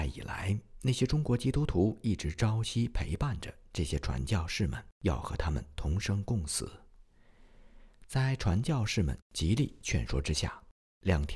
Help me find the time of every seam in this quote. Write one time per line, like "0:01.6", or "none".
0:05.0